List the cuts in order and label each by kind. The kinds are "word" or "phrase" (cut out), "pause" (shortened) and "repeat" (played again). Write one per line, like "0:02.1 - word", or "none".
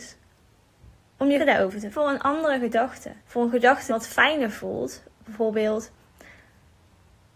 0:01.4 - word
0:01.9 - phrase
0:03.2 - pause
0:03.9 - word